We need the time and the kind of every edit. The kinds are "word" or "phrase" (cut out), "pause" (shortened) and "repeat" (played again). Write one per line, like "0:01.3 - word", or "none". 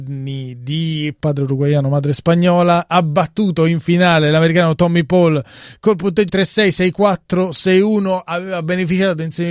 0:06.3 - word